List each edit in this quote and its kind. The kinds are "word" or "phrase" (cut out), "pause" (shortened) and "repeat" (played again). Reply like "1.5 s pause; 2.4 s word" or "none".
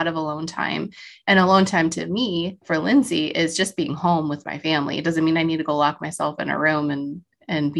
2.6 s pause